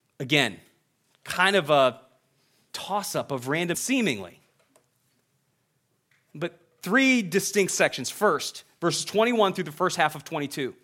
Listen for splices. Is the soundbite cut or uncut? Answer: cut